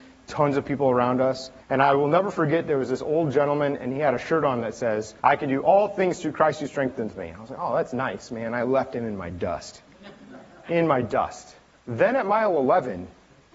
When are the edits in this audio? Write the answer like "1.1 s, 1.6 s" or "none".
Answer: 1.6 s, 5.2 s, 11.7 s

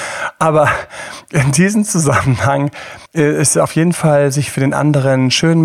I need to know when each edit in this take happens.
3.1 s

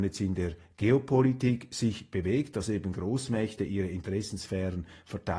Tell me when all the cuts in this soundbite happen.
none

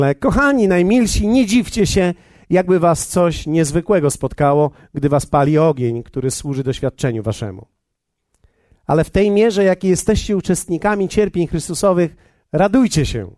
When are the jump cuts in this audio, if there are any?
none

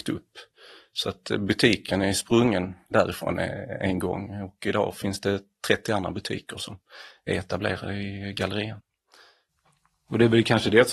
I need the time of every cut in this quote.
2.9 s

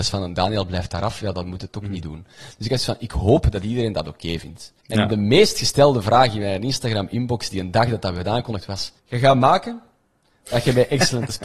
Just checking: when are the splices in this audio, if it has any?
4.8 s, 9.0 s

